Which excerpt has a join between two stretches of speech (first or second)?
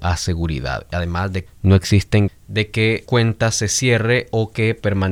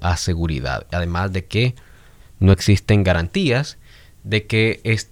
first